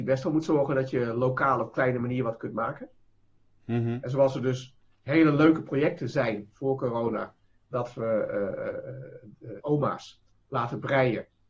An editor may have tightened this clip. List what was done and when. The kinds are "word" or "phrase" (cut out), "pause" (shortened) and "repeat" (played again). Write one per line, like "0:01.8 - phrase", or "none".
0:09.6 - word